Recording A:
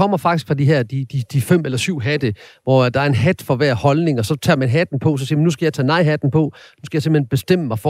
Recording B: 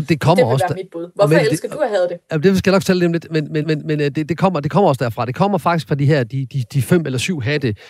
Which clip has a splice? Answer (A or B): B